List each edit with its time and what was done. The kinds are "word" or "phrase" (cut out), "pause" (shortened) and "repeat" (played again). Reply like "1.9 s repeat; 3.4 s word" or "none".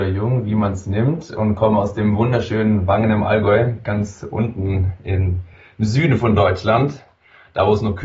none